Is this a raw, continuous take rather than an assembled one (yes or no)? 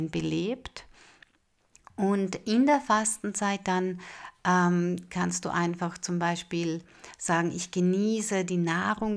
yes